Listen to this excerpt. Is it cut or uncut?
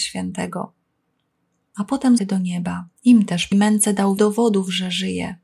cut